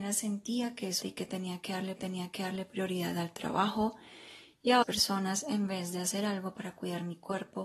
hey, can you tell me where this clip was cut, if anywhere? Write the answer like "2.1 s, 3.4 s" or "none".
1.0 s, 2.0 s, 4.8 s